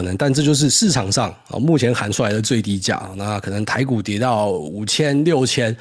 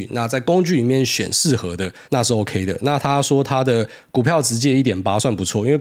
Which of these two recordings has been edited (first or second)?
second